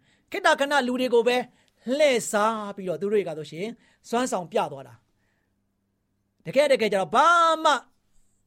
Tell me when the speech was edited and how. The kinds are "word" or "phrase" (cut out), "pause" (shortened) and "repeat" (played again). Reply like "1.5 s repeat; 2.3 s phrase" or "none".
none